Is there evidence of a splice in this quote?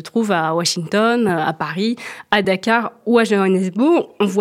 no; 0 cuts

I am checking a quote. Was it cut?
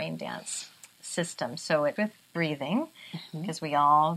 yes; 1 cut; at 2.0 s

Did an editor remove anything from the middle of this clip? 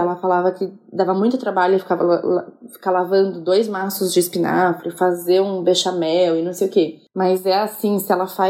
no; 0 cuts

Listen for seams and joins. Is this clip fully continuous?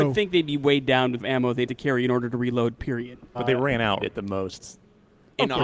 no; 4 cuts; at 1.2 s, 1.7 s, 3.3 s, 4.0 s

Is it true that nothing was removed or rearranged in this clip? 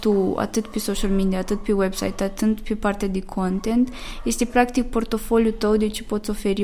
yes; 0 cuts

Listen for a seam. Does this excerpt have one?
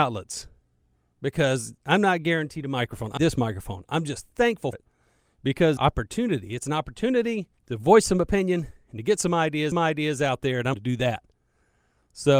yes; 7 cuts; at 1.8 s, 3.2 s, 4.7 s, 5.8 s, 7.6 s, 9.7 s, 10.7 s

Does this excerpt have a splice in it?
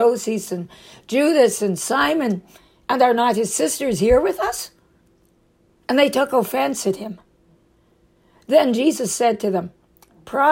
no; 0 cuts

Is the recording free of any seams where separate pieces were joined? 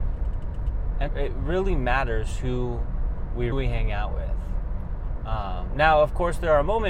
no; 2 cuts; at 1.1 s, 3.5 s

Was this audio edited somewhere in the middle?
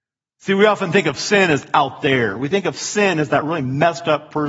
no; 0 cuts

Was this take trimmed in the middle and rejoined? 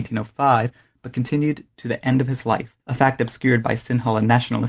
yes; 1 cut; at 2.8 s

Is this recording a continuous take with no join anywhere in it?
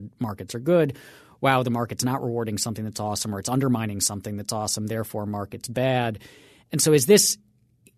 yes; 0 cuts

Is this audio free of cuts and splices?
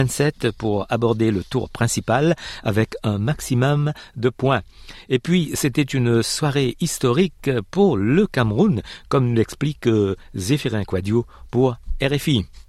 yes; 0 cuts

